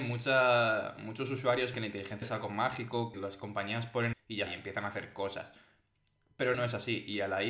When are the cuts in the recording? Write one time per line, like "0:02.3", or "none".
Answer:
0:01.7
0:02.2
0:03.1
0:04.1
0:04.5
0:06.5